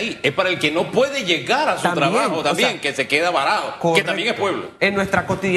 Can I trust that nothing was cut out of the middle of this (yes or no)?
yes